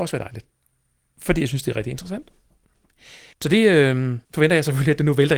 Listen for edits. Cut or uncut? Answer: cut